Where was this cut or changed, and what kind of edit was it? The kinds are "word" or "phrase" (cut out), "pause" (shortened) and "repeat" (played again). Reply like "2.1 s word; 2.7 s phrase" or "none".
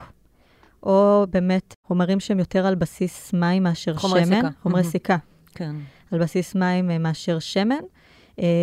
none